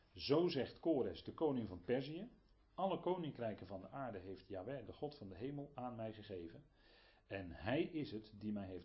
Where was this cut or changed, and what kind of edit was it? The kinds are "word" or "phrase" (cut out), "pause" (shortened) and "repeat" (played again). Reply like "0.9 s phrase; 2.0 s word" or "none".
none